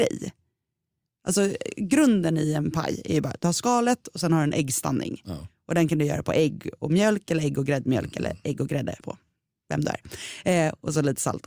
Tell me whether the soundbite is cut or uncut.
cut